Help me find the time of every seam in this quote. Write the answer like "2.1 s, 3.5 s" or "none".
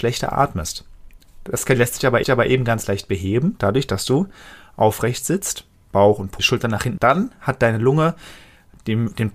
2.2 s, 6.4 s, 7.0 s